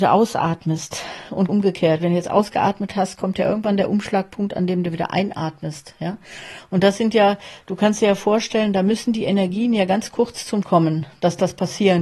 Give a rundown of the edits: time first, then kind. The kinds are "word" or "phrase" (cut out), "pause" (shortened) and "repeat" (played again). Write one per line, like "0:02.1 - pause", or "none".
0:01.5 - word
0:10.6 - word